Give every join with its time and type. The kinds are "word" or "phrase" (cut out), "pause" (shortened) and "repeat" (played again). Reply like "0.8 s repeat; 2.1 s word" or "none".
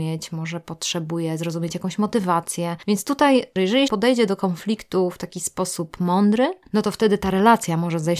3.9 s word

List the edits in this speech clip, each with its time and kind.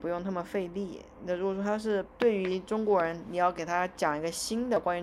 2.1 s pause

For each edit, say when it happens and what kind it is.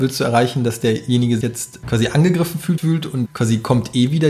1.4 s word; 1.8 s word; 2.8 s word; 3.3 s word

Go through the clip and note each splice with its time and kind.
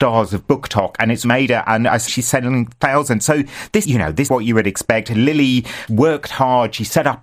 1.2 s word; 2.1 s word; 3.8 s word; 4.3 s word; 5.9 s word

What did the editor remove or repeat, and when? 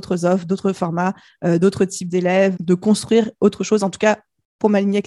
2.5 s word

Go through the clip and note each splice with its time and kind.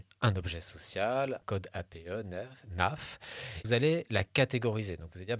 1.4 s word; 3.6 s phrase

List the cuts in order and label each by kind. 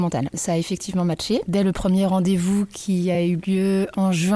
none

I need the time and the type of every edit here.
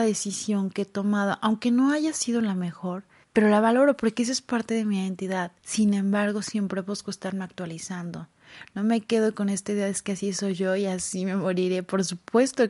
3.2 s pause; 5.6 s pause

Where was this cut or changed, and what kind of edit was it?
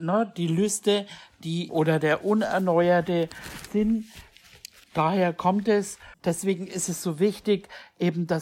1.7 s word; 3.7 s word; 6.1 s word

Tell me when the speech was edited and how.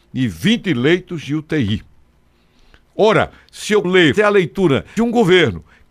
3.8 s word; 4.2 s word; 5.0 s word

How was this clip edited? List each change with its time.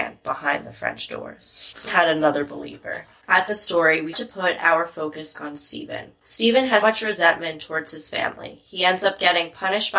1.9 s word; 3.5 s phrase; 4.1 s word; 5.3 s word; 6.8 s word

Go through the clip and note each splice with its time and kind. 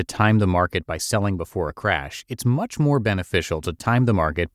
none

